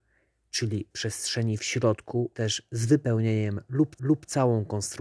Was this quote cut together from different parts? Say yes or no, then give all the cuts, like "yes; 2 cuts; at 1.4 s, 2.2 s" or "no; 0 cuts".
yes; 3 cuts; at 0.9 s, 2.3 s, 4.0 s